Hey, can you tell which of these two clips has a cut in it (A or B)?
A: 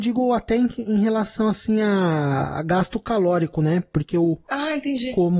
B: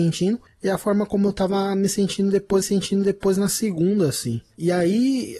B